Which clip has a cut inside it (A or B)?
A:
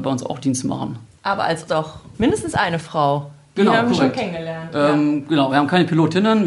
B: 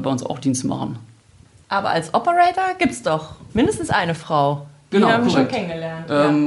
A